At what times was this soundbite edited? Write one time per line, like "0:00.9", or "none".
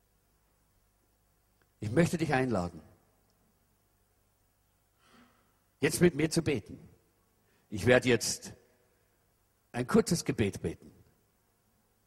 none